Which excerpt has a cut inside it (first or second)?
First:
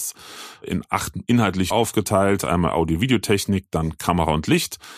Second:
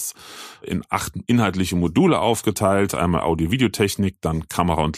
first